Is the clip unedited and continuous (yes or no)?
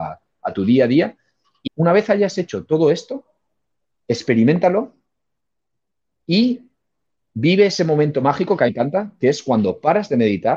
no